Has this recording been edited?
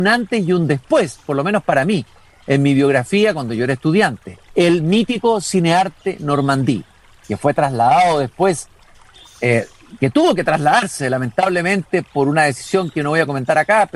yes; 1 cut; at 4.5 s

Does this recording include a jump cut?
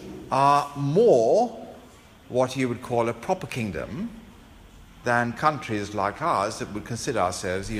no; 0 cuts

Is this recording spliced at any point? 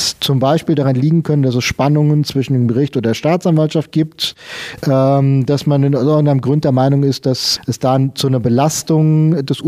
no; 0 cuts

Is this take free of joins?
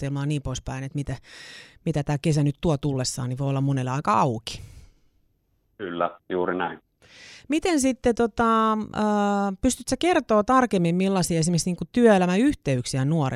yes; 0 cuts

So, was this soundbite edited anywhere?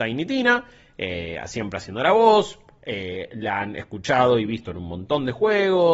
no; 0 cuts

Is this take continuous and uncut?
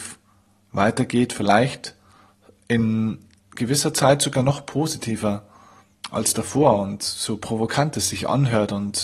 yes; 0 cuts

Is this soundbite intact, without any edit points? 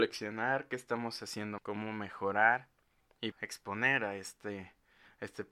no; 2 cuts; at 1.6 s, 3.3 s

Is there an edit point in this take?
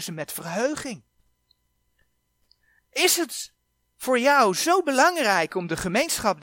no; 0 cuts

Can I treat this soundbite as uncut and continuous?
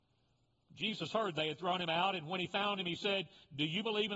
yes; 0 cuts

